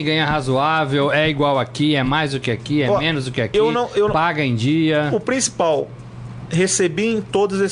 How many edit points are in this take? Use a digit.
0